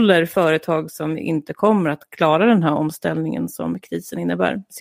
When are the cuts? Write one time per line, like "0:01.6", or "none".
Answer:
none